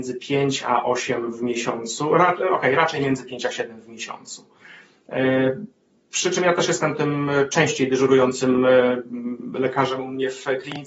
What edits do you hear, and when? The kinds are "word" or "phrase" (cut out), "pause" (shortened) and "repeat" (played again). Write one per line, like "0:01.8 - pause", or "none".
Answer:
0:05.9 - pause